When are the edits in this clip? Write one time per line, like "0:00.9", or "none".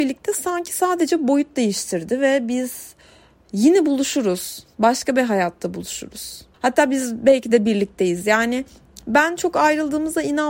0:06.5